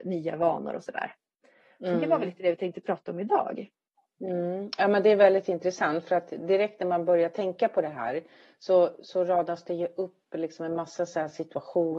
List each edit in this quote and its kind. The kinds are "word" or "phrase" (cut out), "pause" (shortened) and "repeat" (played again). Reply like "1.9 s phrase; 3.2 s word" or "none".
none